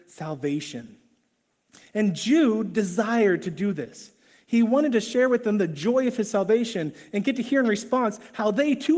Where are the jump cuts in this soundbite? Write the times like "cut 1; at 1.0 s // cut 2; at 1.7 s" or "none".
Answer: none